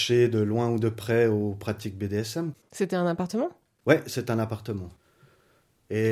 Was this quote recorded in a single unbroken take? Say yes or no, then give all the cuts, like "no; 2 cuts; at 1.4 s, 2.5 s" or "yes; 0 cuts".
yes; 0 cuts